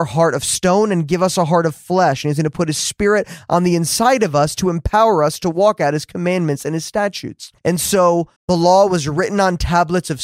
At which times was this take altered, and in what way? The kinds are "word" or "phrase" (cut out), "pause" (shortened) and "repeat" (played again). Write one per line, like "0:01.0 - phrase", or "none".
0:07.6 - pause
0:08.4 - pause